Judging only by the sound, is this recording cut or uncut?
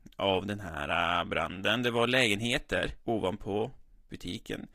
cut